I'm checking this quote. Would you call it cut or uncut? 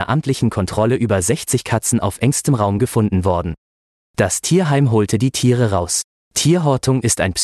uncut